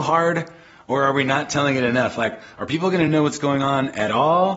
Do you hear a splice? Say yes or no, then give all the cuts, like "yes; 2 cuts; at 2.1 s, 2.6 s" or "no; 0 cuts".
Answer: no; 0 cuts